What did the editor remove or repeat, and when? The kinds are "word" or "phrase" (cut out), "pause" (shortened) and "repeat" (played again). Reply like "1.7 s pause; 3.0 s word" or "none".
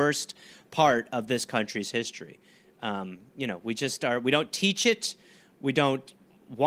none